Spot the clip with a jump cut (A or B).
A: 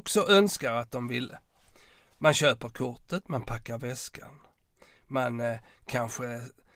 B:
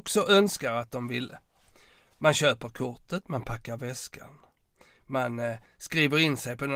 B